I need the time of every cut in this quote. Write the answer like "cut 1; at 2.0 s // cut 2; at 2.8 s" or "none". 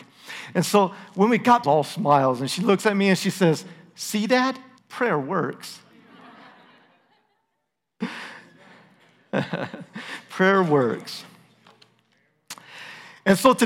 cut 1; at 1.6 s // cut 2; at 4.8 s